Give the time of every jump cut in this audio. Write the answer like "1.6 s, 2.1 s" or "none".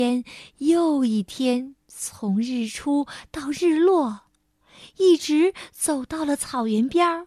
1.8 s